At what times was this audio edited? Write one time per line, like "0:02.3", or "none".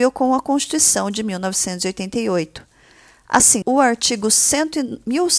0:03.6

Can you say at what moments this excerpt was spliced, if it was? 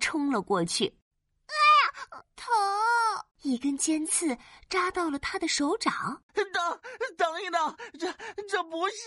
0:02.2
0:03.3
0:06.3

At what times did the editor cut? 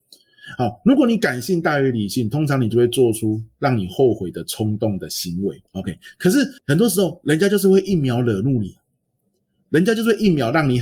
0:05.7
0:06.6

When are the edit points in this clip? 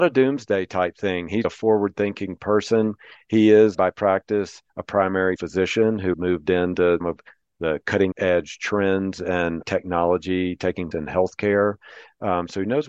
0:01.4
0:03.7
0:04.7
0:05.4
0:06.1
0:07.0
0:08.1
0:09.6
0:10.9

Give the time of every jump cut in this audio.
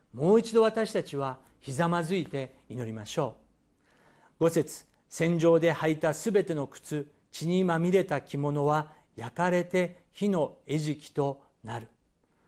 none

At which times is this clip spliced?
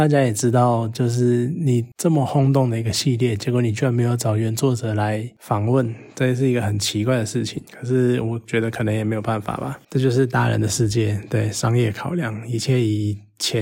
0:07.7

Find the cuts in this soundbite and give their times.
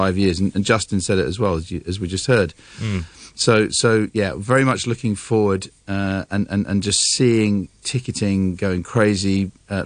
none

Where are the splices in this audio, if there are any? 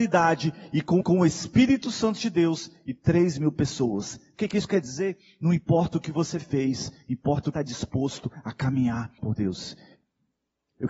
0:01.0
0:07.5
0:09.2

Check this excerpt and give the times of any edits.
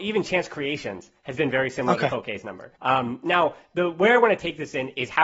0:02.8

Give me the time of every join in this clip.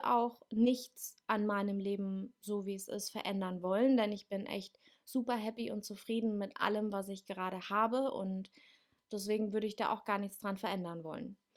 none

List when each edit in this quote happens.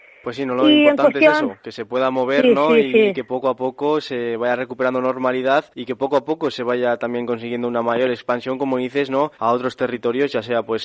0:05.7
0:09.3

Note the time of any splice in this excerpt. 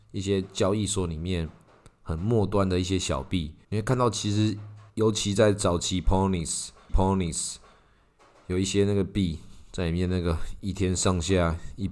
0:03.6
0:04.9
0:06.9

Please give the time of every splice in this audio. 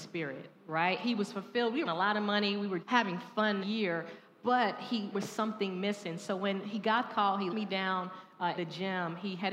0:01.9
0:02.8
0:03.6
0:05.1
0:07.1
0:07.5
0:08.6

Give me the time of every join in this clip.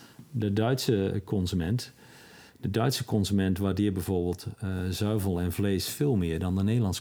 none

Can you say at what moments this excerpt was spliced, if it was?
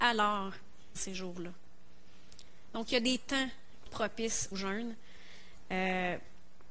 0:01.0
0:03.9
0:04.5

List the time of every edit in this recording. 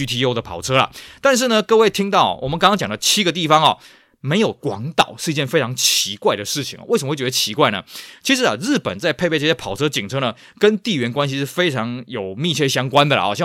none

